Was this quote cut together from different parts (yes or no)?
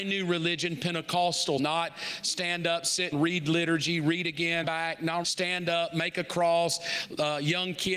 yes